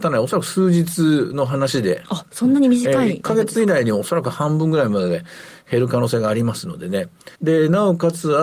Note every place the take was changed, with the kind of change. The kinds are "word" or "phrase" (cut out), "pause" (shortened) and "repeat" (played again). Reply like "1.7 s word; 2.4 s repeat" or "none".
7.4 s pause